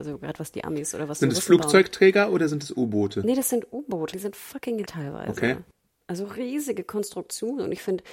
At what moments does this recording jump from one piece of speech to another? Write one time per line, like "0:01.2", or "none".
0:04.1
0:04.9